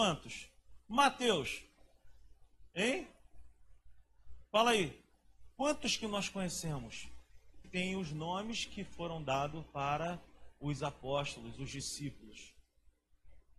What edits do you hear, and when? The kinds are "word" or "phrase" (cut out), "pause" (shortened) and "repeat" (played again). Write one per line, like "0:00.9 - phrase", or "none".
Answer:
0:07.6 - word